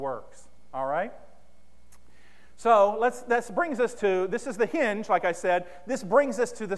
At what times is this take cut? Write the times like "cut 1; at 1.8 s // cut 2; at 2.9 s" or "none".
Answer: cut 1; at 4.0 s